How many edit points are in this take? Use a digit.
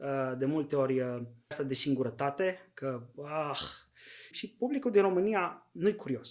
2